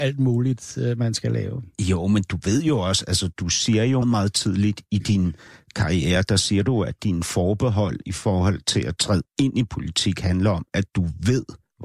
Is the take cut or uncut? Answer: cut